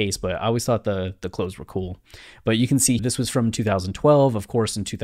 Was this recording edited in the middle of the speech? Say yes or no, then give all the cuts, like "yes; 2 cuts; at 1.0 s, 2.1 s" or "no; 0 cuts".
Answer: yes; 1 cut; at 3.0 s